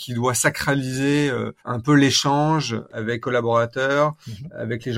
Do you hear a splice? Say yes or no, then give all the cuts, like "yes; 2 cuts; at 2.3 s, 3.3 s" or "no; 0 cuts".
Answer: yes; 2 cuts; at 1.6 s, 3.2 s